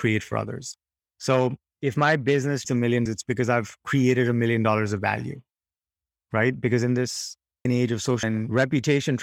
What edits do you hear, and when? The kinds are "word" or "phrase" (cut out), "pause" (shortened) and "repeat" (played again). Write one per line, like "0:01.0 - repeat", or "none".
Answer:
0:02.6 - word
0:03.1 - word
0:07.7 - word
0:08.2 - word